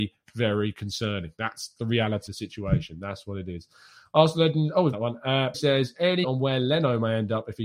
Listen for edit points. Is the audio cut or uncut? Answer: cut